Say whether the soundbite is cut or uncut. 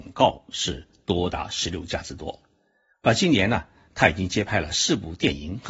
uncut